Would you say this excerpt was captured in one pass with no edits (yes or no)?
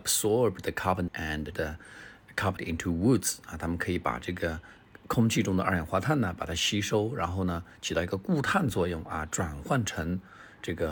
no